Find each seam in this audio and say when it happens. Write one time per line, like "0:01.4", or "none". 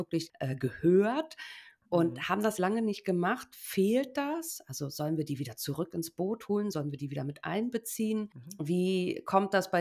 0:02.6